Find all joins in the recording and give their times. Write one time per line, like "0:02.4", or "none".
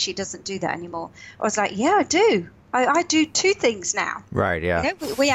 none